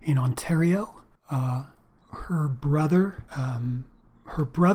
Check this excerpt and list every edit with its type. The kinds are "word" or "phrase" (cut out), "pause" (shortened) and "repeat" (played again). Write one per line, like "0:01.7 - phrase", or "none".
0:01.2 - pause
0:03.3 - pause

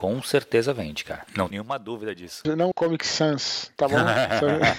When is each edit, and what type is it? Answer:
0:01.5 - word
0:02.7 - word

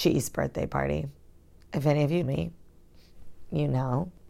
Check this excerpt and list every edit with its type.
0:02.2 - word

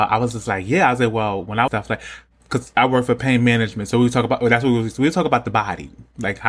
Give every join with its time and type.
0:01.7 - phrase

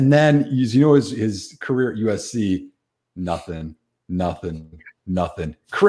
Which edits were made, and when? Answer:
none

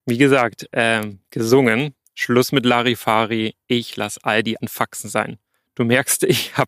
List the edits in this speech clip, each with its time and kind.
0:04.6 - word

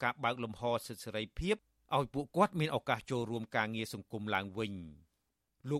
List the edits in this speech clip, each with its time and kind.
none

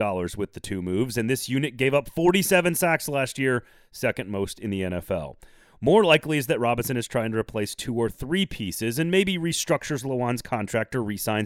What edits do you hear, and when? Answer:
none

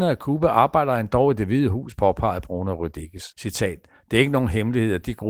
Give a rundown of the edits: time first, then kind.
0:03.3 - pause

